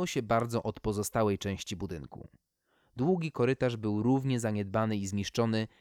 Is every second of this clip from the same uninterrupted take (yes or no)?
yes